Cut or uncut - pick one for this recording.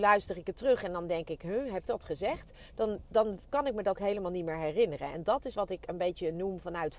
cut